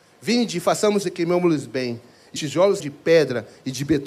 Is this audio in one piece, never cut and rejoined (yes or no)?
no